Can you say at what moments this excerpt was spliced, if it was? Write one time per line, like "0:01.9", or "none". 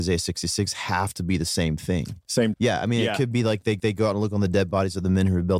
0:02.5
0:03.8